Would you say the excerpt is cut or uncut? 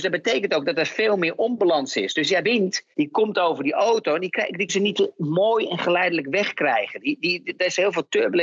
cut